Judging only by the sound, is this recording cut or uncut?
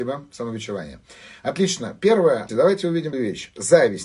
cut